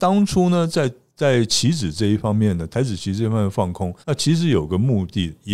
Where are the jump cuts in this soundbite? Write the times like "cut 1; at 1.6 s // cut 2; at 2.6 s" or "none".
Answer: cut 1; at 4.0 s